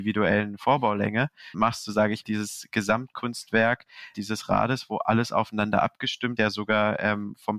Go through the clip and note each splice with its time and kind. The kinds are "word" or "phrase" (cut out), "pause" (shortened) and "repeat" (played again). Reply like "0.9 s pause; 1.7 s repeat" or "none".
1.5 s word; 2.2 s word; 4.1 s word; 6.4 s word